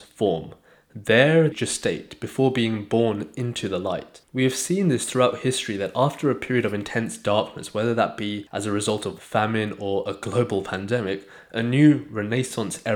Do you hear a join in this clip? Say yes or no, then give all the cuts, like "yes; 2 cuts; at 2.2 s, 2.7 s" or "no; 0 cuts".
yes; 2 cuts; at 1.5 s, 9.2 s